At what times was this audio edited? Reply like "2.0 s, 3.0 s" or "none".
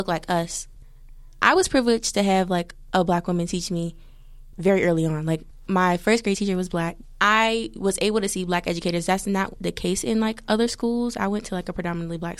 none